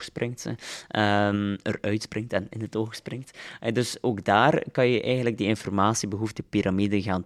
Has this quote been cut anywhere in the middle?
no; 0 cuts

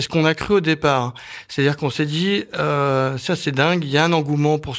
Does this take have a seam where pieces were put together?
no; 0 cuts

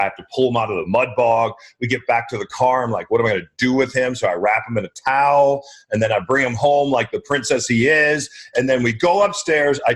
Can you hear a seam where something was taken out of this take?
no; 0 cuts

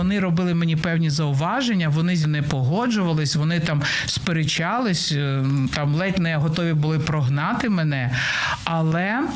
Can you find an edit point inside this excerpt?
yes; 1 cut; at 2.2 s

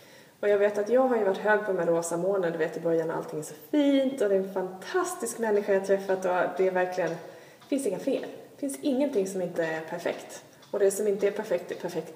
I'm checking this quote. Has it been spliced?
no; 0 cuts

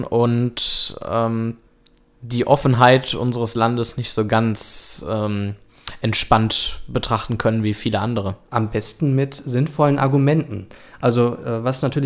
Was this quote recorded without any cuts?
yes; 0 cuts

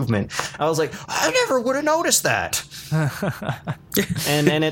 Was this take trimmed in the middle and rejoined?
no; 0 cuts

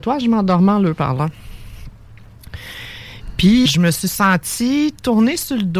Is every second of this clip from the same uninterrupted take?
no; 1 cut; at 3.7 s

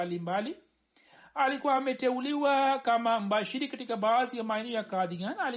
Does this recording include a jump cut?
no; 0 cuts

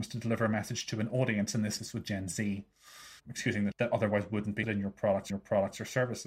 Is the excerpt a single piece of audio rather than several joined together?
no; 5 cuts; at 1.8 s, 3.2 s, 3.7 s, 4.6 s, 5.3 s

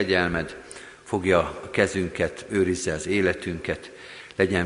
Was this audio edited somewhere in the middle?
no; 0 cuts

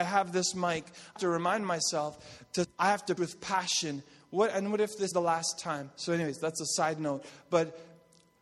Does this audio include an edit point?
yes; 4 cuts; at 1.2 s, 2.6 s, 3.2 s, 5.1 s

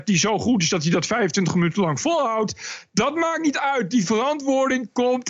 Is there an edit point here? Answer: no; 0 cuts

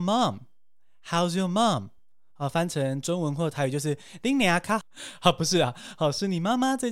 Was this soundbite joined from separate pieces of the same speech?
no; 0 cuts

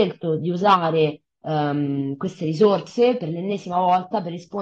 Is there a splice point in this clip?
no; 0 cuts

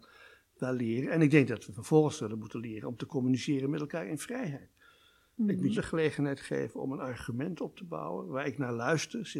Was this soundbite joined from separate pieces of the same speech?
yes; 1 cut; at 5.7 s

